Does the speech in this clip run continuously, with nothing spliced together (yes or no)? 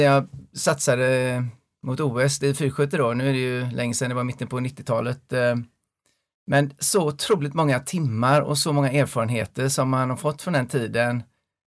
yes